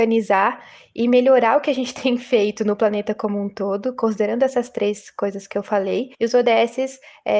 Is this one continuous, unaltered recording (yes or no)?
no